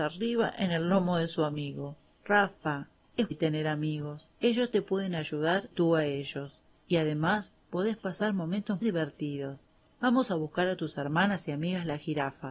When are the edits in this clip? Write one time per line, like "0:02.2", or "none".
0:03.3
0:04.3
0:05.7
0:08.8

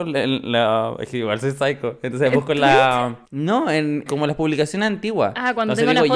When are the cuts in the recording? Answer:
0:03.3
0:04.1

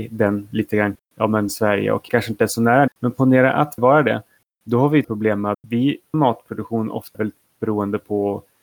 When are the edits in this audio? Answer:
0:00.9
0:01.5
0:02.1
0:02.9
0:03.8
0:05.0
0:05.5
0:06.1
0:07.1

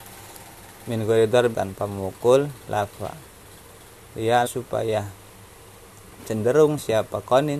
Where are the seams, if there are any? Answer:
0:01.5
0:02.7
0:04.5

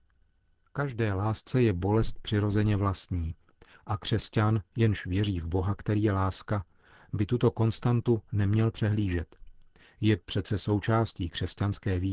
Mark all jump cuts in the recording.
none

